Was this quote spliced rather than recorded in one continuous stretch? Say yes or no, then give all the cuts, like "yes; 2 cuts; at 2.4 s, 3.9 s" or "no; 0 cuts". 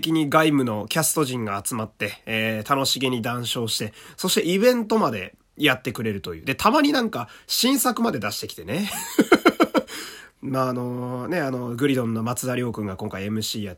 no; 0 cuts